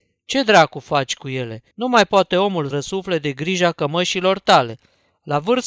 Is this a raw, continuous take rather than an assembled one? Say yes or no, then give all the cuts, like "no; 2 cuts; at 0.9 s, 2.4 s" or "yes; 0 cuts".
no; 2 cuts; at 1.7 s, 2.7 s